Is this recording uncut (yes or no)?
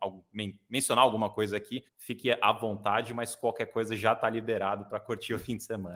no